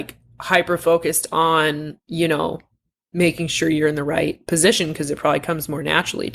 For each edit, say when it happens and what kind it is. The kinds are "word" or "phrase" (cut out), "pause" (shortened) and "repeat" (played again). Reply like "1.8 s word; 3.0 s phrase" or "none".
none